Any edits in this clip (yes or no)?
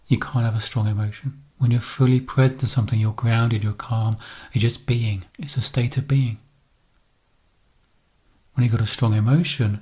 yes